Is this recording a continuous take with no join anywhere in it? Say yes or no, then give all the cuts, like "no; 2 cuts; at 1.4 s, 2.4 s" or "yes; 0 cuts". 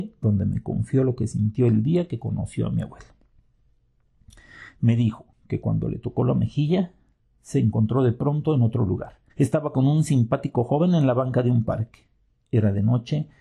no; 1 cut; at 9.3 s